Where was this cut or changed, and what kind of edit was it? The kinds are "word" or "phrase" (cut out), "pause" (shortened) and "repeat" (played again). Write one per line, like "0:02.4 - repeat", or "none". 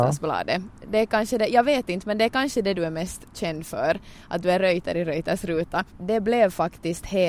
0:05.9 - pause